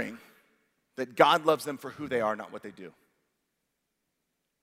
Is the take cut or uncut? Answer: uncut